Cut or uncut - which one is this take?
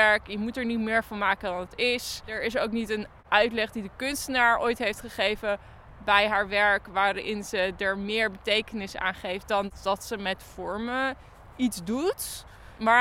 uncut